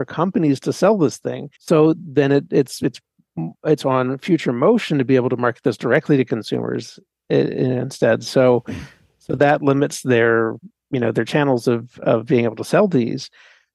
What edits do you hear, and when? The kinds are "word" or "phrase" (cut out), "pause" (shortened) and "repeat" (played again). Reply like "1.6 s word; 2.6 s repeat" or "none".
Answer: 1.5 s pause